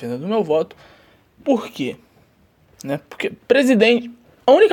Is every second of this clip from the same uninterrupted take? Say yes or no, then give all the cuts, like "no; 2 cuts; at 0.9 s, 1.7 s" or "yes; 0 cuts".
no; 1 cut; at 3.4 s